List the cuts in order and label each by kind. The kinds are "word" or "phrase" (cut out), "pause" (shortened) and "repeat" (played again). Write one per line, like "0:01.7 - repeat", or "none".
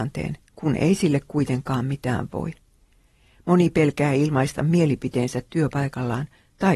none